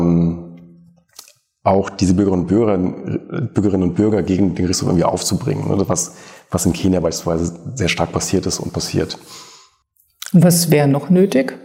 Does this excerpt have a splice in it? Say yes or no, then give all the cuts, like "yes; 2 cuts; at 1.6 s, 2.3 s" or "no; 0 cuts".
no; 0 cuts